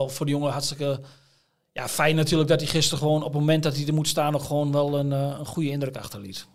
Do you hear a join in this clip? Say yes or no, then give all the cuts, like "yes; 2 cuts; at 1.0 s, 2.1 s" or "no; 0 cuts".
no; 0 cuts